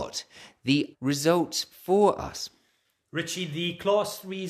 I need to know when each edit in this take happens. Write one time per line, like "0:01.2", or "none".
0:00.9